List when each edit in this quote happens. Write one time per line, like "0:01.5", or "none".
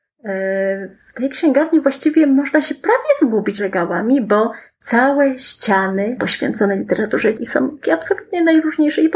0:03.6
0:06.2
0:07.4
0:07.8